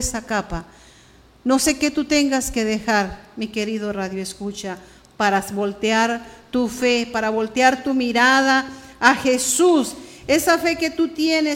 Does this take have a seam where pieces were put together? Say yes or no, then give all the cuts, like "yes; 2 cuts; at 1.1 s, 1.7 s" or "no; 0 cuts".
no; 0 cuts